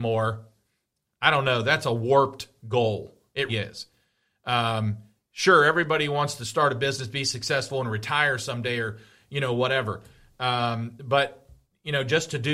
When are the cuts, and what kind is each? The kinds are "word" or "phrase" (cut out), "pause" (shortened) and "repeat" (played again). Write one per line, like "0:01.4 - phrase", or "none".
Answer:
0:03.5 - word